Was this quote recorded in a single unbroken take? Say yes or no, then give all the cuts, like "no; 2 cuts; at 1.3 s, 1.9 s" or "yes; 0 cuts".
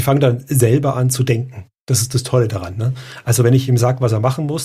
yes; 0 cuts